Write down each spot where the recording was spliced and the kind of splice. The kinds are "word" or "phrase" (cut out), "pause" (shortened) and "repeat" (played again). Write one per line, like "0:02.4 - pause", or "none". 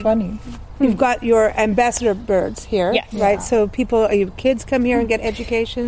none